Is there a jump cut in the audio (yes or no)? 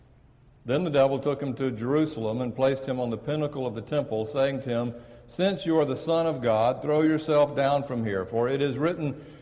no